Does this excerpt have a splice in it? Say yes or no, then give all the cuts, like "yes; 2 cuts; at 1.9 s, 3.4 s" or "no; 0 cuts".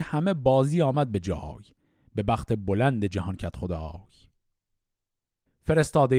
no; 0 cuts